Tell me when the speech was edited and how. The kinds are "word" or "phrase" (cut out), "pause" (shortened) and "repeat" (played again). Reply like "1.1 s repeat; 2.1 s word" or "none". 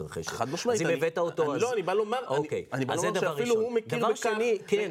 none